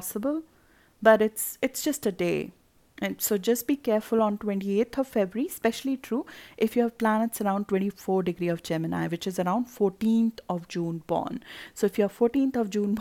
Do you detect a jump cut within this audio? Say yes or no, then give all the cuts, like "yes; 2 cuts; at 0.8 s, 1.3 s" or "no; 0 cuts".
no; 0 cuts